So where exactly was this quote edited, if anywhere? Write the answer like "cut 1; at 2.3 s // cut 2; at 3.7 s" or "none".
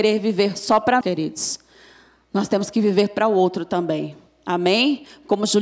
cut 1; at 1.0 s